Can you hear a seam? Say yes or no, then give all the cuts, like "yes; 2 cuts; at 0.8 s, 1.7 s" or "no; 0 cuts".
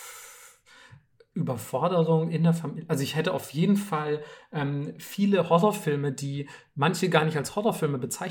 no; 0 cuts